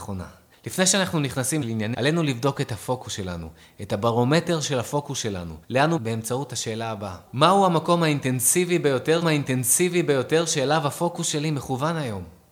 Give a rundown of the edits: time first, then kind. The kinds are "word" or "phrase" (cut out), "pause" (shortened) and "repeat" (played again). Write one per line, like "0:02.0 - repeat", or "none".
0:01.6 - phrase
0:01.9 - word
0:05.6 - pause
0:06.0 - word
0:07.3 - pause
0:09.2 - repeat